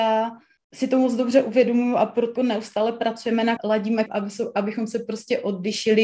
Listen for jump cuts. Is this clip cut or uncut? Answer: cut